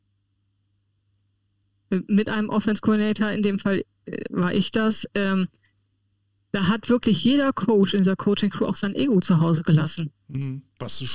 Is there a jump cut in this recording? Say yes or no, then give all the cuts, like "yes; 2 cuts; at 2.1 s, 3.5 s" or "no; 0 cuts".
no; 0 cuts